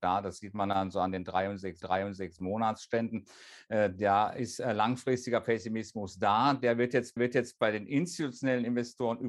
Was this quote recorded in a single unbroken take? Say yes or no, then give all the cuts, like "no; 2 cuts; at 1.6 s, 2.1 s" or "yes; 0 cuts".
no; 2 cuts; at 1.8 s, 7.2 s